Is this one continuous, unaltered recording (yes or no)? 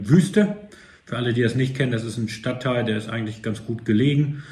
yes